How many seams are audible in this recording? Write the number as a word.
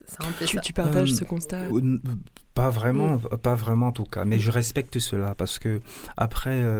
two